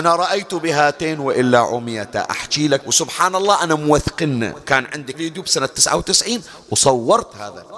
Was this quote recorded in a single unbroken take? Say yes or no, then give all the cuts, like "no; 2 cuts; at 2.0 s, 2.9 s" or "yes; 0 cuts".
no; 2 cuts; at 2.8 s, 5.1 s